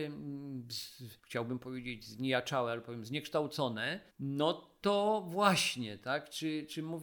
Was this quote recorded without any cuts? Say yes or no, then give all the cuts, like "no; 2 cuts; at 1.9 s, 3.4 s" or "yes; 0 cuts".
no; 2 cuts; at 1.2 s, 4.1 s